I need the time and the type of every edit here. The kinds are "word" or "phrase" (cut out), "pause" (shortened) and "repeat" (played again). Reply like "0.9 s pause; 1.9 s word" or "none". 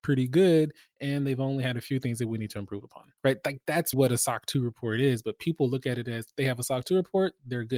3.2 s pause; 3.9 s word